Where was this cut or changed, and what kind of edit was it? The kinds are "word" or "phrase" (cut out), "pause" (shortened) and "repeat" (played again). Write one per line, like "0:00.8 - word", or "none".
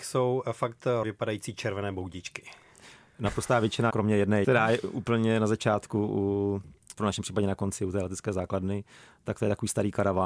0:01.0 - word
0:03.9 - word
0:04.4 - word
0:06.9 - word